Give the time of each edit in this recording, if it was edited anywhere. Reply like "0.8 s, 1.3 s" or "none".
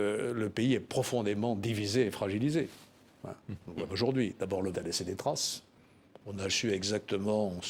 3.9 s, 4.7 s, 6.5 s